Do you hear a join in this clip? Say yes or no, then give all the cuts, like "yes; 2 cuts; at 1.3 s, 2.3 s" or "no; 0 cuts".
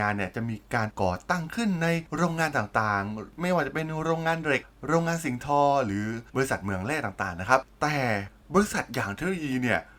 yes; 1 cut; at 6.3 s